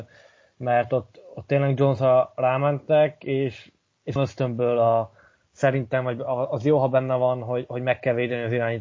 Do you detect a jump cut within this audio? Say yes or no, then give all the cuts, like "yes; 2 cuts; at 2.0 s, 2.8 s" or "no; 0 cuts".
yes; 1 cut; at 4.2 s